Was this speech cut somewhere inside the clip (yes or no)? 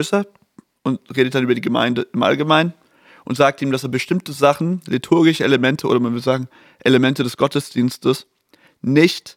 no